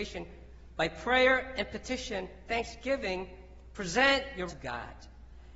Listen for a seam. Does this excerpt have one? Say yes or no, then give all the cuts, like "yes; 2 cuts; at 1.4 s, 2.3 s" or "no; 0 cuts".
yes; 2 cuts; at 2.5 s, 4.5 s